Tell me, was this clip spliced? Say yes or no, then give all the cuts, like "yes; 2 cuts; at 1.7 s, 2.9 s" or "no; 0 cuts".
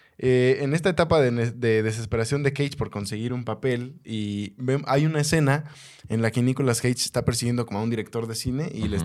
no; 0 cuts